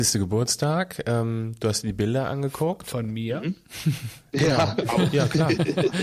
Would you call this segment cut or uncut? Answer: uncut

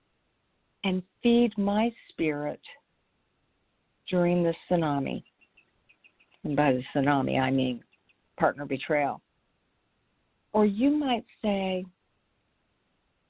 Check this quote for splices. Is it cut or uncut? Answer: uncut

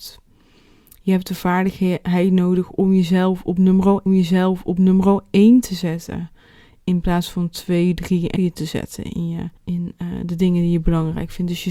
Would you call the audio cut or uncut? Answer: cut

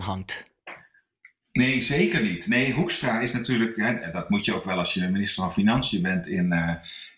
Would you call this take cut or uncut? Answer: uncut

